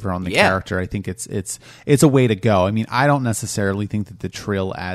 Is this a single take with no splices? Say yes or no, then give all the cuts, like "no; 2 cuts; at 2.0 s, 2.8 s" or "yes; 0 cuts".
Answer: yes; 0 cuts